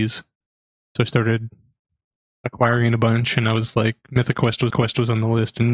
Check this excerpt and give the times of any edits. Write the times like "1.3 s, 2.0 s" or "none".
4.7 s